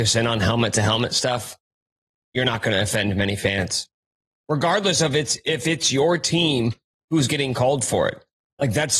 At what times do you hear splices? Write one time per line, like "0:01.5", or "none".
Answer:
none